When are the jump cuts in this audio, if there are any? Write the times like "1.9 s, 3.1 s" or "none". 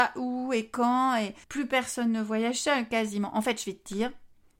1.4 s